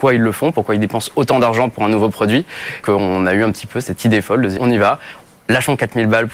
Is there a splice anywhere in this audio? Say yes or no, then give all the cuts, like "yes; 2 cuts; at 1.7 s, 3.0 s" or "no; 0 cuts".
yes; 2 cuts; at 2.8 s, 4.6 s